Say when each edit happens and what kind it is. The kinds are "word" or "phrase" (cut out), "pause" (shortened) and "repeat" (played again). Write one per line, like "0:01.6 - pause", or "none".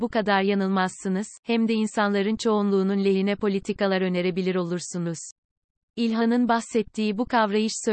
none